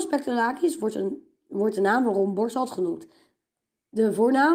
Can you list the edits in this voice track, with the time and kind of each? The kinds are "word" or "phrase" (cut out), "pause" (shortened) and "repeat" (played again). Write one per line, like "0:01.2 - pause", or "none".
none